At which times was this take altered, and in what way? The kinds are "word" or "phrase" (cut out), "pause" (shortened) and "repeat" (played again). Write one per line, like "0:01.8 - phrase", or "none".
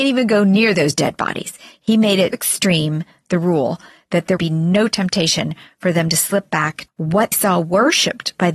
0:02.3 - word
0:04.4 - word
0:06.9 - word
0:07.3 - word